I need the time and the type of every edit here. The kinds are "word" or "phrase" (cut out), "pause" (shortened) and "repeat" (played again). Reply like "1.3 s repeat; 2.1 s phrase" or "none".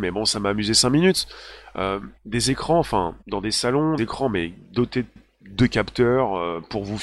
2.2 s pause; 3.2 s pause; 4.0 s word; 5.2 s repeat

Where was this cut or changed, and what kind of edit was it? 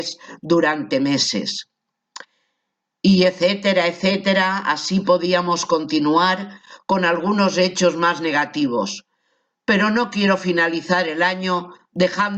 none

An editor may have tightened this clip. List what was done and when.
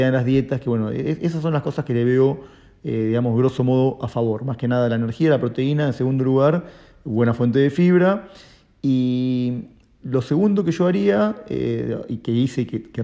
none

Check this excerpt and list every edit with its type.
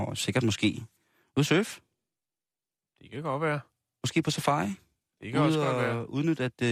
none

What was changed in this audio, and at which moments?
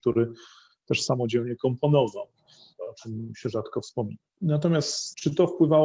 none

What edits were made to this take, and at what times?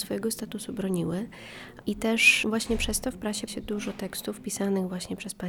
3.5 s word

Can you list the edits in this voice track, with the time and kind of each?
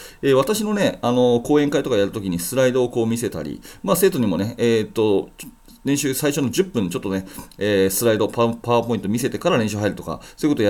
none

